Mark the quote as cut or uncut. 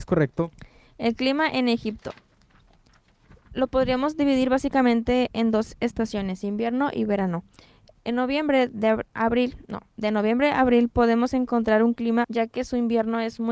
cut